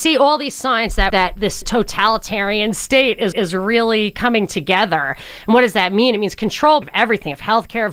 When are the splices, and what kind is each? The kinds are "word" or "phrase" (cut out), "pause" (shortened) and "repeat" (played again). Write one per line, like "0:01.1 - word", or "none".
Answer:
0:01.1 - word
0:01.6 - word
0:03.3 - repeat
0:06.8 - word